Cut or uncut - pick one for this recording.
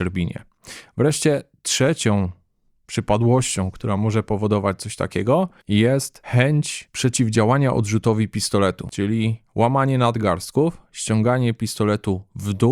uncut